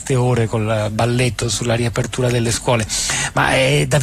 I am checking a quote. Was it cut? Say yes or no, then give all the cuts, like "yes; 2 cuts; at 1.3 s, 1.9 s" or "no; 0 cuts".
no; 0 cuts